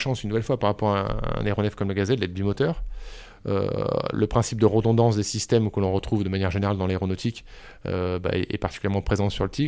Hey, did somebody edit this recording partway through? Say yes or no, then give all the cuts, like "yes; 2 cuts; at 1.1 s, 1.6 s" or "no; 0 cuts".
no; 0 cuts